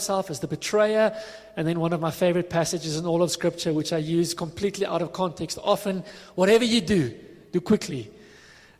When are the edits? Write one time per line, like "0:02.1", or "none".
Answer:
none